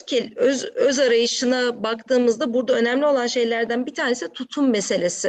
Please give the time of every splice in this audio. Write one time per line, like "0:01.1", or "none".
none